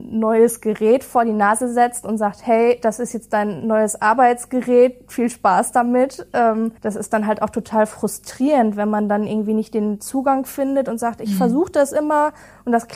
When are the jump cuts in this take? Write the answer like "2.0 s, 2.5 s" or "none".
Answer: 6.8 s